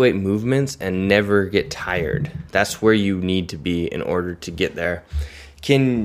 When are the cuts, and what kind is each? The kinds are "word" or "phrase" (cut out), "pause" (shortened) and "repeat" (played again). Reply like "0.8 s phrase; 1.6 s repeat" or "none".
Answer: none